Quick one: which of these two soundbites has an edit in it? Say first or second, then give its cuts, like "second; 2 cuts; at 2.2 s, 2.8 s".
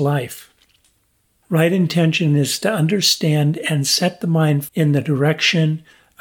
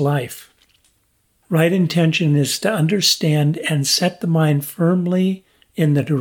first; 1 cut; at 4.7 s